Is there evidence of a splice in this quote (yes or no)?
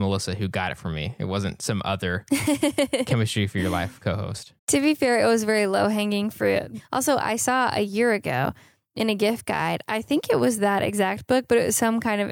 yes